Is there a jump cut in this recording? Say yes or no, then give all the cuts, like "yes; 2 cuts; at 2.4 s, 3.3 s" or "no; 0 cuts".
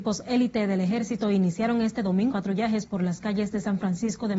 yes; 1 cut; at 2.3 s